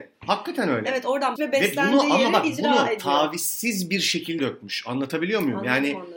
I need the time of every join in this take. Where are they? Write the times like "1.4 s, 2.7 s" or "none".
1.4 s, 4.4 s

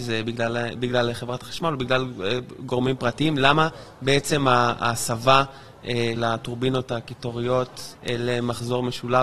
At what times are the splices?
6.2 s, 8.0 s

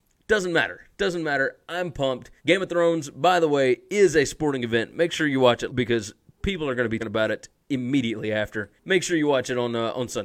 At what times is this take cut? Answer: 0.9 s, 2.4 s, 5.7 s, 7.0 s, 8.8 s

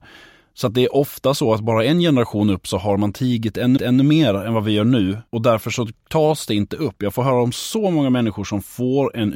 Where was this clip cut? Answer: 3.8 s, 5.3 s

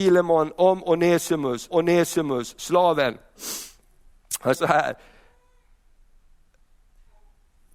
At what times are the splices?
1.7 s, 4.5 s

